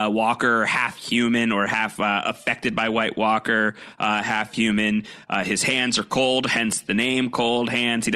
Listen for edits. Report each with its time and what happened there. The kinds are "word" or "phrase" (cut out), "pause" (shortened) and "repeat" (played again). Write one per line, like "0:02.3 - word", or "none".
none